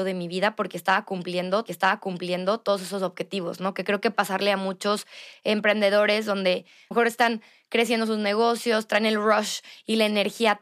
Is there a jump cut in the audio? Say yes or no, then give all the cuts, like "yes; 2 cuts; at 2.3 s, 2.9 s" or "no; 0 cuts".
yes; 3 cuts; at 1.7 s, 4.1 s, 6.9 s